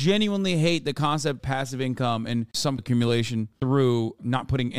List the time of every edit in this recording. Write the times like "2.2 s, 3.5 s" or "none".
1.4 s, 2.8 s